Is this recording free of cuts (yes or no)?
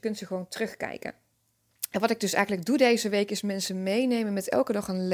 yes